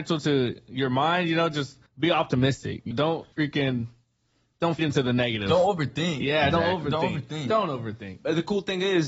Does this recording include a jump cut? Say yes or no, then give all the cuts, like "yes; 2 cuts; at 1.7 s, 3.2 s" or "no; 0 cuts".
yes; 4 cuts; at 1.9 s, 2.9 s, 3.3 s, 4.8 s